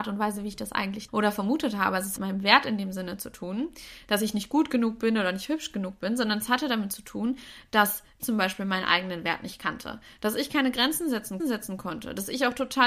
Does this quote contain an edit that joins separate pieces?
yes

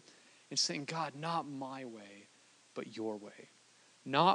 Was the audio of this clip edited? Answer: no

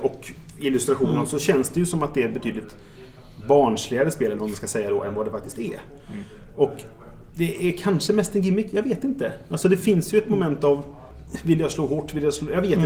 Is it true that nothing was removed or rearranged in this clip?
yes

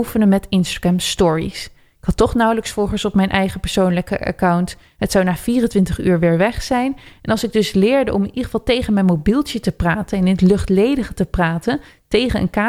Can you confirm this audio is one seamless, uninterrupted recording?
yes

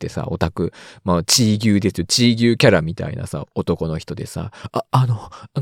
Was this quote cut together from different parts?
yes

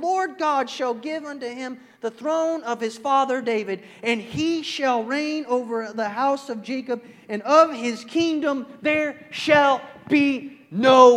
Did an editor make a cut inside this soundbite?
no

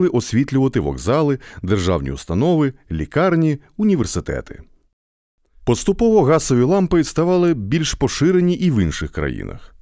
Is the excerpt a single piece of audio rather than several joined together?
yes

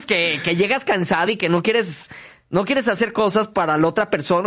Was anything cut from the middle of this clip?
no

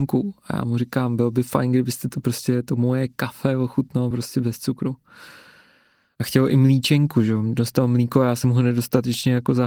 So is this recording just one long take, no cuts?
yes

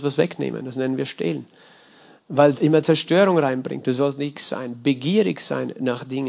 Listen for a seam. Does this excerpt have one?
yes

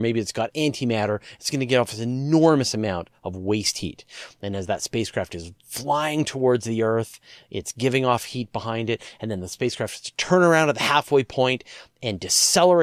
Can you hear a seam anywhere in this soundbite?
no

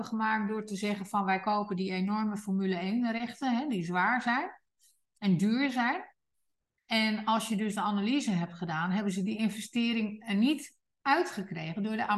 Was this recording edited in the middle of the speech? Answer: no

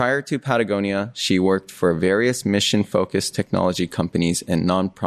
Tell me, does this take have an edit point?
no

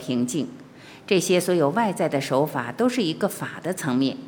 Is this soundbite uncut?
yes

